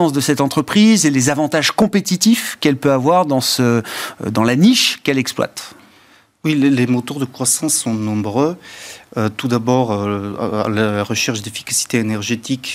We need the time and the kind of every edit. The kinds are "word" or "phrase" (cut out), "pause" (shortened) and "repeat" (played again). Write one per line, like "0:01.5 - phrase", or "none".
none